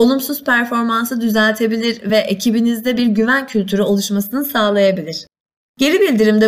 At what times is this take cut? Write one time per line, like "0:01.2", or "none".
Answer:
none